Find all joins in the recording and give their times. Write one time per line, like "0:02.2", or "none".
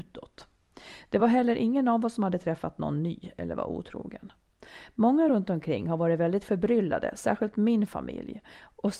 none